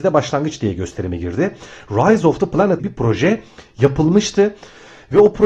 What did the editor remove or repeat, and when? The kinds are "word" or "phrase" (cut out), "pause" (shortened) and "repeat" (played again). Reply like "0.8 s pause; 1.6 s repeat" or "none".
2.8 s phrase

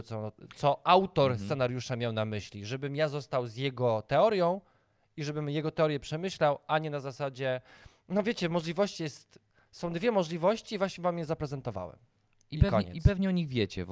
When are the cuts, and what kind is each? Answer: none

